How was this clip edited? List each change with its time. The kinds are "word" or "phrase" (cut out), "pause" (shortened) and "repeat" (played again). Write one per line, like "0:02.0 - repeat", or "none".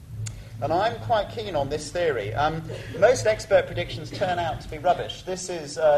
none